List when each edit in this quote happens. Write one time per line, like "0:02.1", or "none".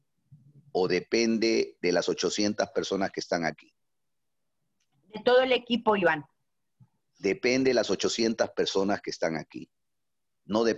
none

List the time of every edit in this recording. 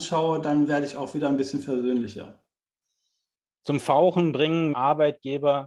0:04.7

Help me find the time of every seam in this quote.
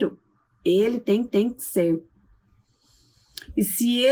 0:01.3

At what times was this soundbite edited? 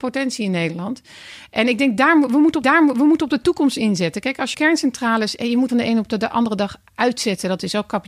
0:02.6
0:04.5
0:05.7

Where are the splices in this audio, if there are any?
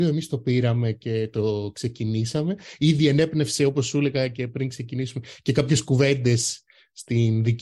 none

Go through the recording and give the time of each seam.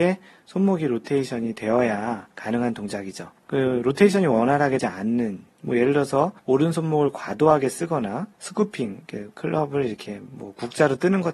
0:02.3
0:03.4
0:04.8
0:06.4
0:08.3

